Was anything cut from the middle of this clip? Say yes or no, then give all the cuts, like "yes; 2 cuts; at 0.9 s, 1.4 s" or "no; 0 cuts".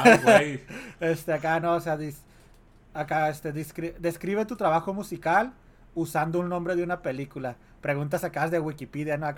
no; 0 cuts